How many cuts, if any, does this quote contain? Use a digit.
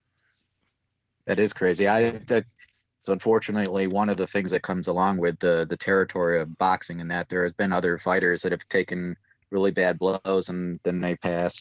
0